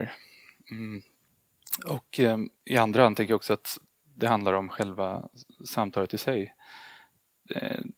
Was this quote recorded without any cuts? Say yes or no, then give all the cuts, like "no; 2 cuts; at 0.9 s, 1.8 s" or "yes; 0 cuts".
no; 1 cut; at 2.5 s